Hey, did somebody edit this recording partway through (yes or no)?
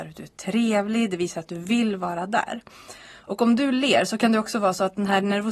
no